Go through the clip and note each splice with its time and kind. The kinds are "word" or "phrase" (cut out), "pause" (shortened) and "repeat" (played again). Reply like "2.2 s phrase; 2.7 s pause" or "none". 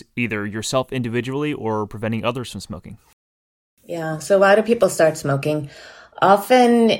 none